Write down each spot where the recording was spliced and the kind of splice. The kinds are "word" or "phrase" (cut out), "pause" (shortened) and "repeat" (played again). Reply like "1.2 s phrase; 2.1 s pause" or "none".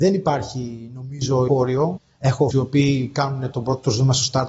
1.5 s word; 2.5 s word; 3.5 s word